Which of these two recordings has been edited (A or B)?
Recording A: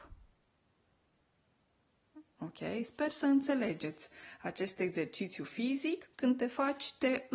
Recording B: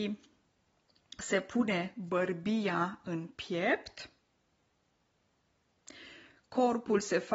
A